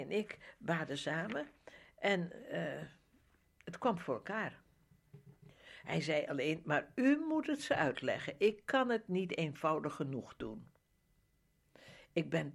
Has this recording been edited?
no; 0 cuts

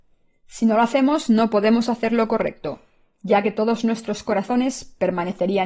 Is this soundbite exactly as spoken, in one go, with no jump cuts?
yes; 0 cuts

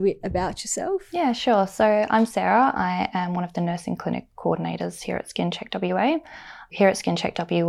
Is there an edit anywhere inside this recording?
no; 0 cuts

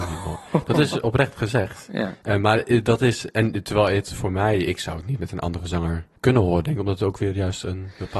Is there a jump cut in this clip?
yes; 1 cut; at 6.2 s

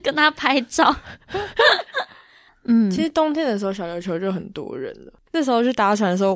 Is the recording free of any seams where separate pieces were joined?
yes; 0 cuts

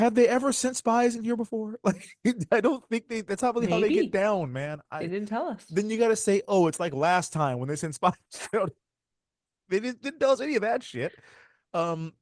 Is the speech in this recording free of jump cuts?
yes; 0 cuts

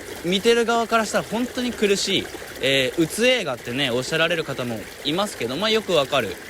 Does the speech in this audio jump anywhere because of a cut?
no; 0 cuts

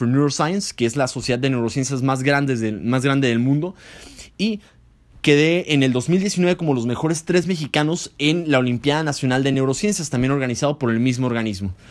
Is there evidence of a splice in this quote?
no; 0 cuts

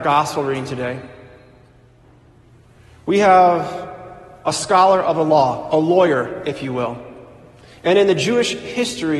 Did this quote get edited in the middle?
no; 0 cuts

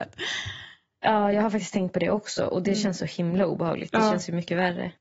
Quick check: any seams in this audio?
no; 0 cuts

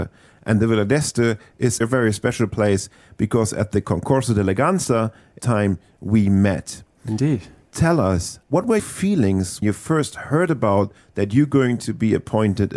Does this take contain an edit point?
yes; 5 cuts; at 1.8 s, 5.4 s, 8.4 s, 8.8 s, 9.6 s

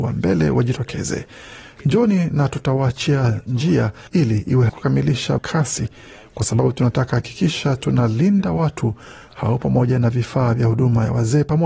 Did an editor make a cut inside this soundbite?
yes; 3 cuts; at 4.1 s, 4.7 s, 5.4 s

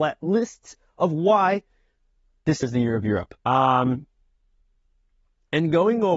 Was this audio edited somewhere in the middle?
yes; 2 cuts; at 2.6 s, 3.4 s

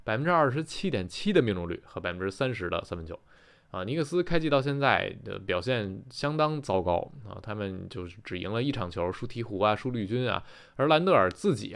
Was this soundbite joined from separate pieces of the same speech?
no; 0 cuts

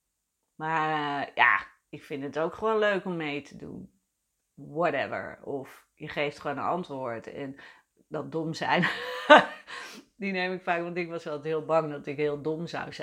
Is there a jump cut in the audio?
no; 0 cuts

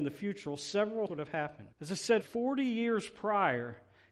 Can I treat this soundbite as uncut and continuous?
no; 3 cuts; at 1.1 s, 1.7 s, 2.2 s

